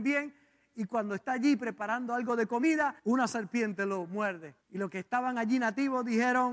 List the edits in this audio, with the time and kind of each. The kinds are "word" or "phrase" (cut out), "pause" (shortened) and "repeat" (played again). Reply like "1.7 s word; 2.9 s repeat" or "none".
3.0 s pause; 4.6 s pause